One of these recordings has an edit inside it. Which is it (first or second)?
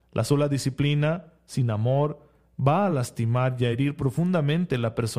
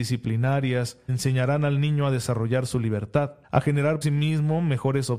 second